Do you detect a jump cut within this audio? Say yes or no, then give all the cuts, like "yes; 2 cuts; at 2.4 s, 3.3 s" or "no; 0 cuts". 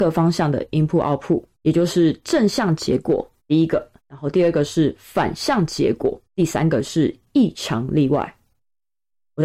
yes; 4 cuts; at 1.5 s, 3.4 s, 4.0 s, 6.2 s